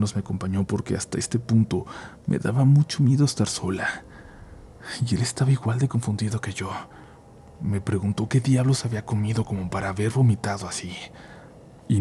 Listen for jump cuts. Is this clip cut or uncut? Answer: uncut